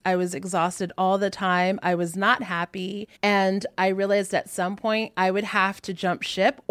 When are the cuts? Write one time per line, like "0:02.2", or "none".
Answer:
0:03.2